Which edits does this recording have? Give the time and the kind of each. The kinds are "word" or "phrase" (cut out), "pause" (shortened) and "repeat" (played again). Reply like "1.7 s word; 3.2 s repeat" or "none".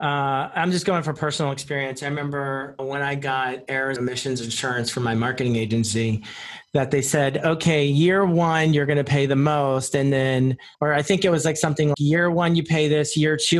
2.8 s word; 4.0 s word; 10.7 s pause; 11.9 s word